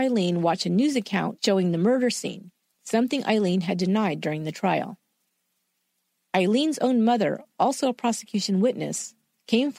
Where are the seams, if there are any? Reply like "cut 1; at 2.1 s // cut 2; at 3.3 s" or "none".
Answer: none